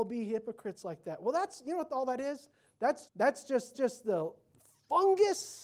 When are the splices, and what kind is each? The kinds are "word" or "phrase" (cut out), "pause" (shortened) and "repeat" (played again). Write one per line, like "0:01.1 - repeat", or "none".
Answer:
0:03.0 - word
0:03.7 - repeat